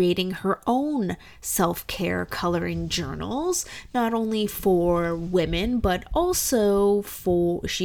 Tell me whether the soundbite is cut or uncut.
uncut